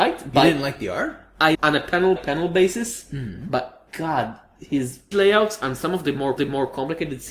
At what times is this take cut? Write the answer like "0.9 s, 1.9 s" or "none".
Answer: 1.5 s, 2.2 s, 3.9 s, 5.1 s, 6.4 s